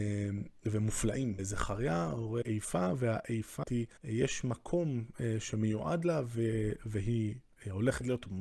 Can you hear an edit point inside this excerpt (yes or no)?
yes